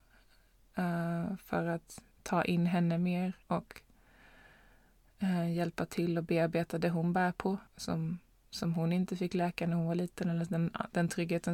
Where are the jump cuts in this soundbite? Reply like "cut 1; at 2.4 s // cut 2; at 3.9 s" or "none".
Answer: cut 1; at 2.1 s // cut 2; at 3.4 s // cut 3; at 7.7 s